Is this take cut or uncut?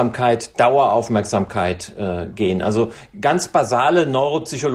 uncut